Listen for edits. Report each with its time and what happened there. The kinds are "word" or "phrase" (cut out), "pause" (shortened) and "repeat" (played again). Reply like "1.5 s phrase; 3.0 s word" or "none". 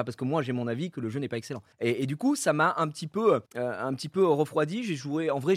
1.7 s pause; 3.5 s pause